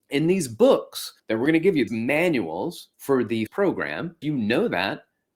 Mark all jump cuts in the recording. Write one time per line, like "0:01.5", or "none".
0:01.2
0:01.9
0:02.9
0:03.5
0:04.2

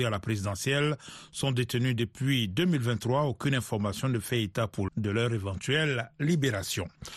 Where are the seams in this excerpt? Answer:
0:04.9

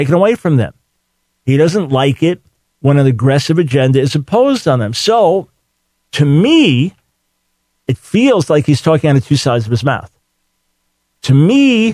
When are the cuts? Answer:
none

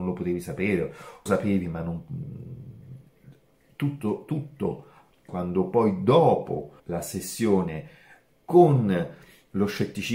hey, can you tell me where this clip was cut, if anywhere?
0:01.3
0:05.3
0:06.8

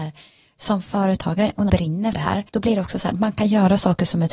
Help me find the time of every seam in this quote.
0:01.7
0:02.1
0:02.5

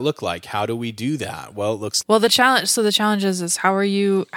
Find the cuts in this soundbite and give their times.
0:02.0

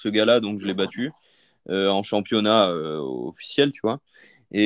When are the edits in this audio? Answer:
none

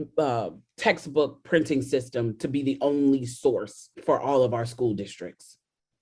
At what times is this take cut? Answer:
0:03.9

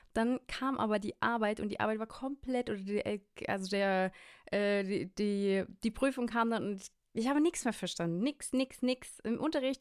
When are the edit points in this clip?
none

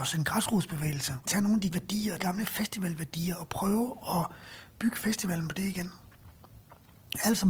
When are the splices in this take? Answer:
0:01.2
0:01.7
0:02.2

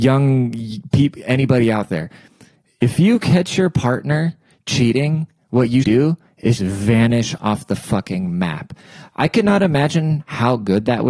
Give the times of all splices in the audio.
0:05.8
0:06.6

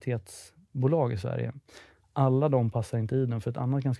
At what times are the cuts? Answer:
none

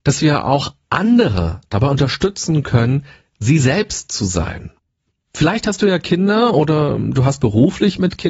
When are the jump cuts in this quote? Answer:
none

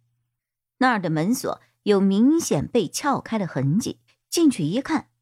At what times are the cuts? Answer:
0:04.1

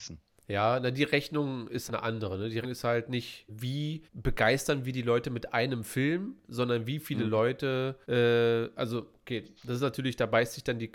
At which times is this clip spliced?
0:01.9
0:02.6
0:03.5
0:04.0
0:08.0
0:09.6

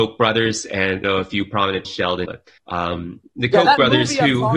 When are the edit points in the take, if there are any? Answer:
0:01.0
0:01.8
0:02.2
0:02.6

